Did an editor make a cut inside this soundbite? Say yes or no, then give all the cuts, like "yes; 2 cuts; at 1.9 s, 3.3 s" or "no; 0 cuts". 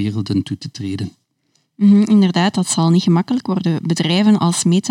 no; 0 cuts